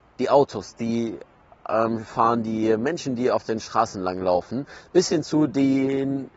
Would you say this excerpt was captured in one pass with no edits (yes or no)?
yes